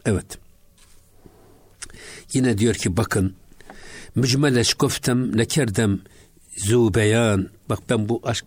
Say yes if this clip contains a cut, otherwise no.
no